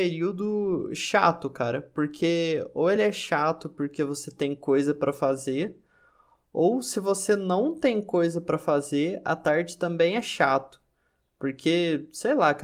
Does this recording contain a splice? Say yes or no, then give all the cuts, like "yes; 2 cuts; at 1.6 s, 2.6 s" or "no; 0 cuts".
no; 0 cuts